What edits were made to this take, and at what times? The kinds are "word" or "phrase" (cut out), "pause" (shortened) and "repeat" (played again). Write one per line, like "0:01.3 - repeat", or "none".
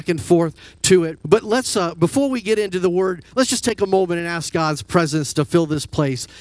0:01.2 - pause